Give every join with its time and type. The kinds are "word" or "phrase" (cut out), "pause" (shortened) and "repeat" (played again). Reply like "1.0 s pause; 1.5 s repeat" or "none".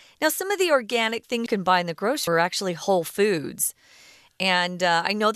1.5 s word; 2.3 s word